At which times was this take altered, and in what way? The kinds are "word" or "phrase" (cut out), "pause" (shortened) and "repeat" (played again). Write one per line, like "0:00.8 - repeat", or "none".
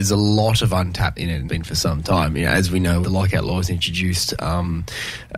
0:01.2 - word
0:01.5 - word
0:03.0 - phrase